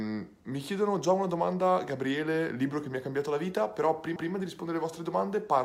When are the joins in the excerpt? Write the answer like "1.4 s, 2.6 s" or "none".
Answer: 4.2 s